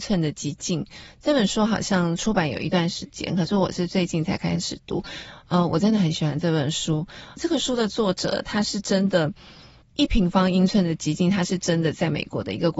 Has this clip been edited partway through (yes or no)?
no